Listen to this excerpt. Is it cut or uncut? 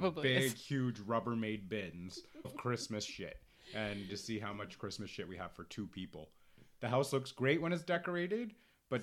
cut